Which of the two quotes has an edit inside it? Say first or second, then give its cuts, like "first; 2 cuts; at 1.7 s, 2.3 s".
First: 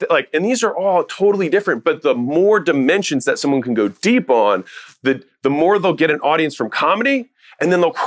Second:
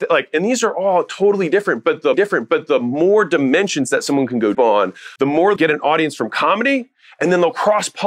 second; 4 cuts; at 2.1 s, 4.5 s, 5.2 s, 5.6 s